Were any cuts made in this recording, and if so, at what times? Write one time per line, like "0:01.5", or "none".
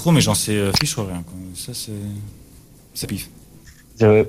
0:03.0